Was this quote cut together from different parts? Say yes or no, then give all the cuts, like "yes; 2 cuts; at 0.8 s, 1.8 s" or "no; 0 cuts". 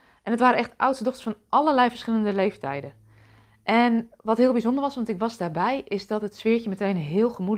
no; 0 cuts